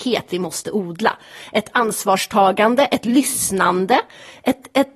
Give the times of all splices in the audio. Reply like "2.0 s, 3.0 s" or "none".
none